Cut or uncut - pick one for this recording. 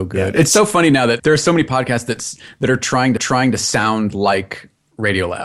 cut